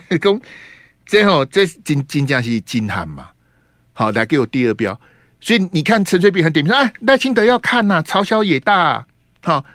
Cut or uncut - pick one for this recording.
uncut